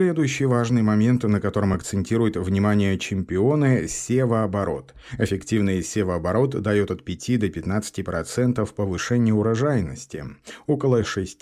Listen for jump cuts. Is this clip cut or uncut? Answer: uncut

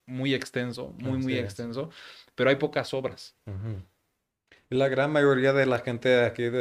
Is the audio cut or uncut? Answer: uncut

